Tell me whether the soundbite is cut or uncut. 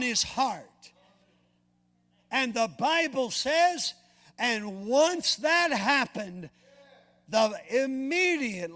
uncut